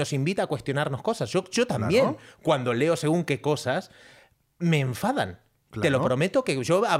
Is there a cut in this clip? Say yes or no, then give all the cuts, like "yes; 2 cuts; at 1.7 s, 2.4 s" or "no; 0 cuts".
no; 0 cuts